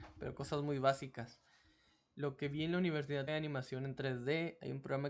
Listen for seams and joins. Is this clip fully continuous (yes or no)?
no